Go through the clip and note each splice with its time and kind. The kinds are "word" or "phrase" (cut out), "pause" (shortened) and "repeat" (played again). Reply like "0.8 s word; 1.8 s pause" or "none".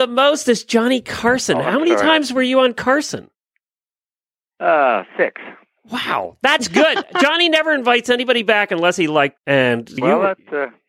9.4 s word; 10.0 s word